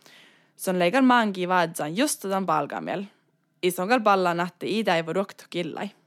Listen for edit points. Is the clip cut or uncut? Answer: uncut